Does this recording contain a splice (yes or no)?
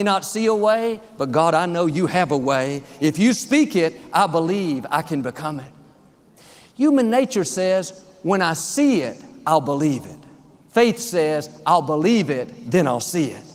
no